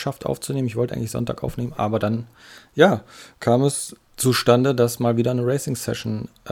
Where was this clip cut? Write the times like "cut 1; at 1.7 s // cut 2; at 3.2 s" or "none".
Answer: none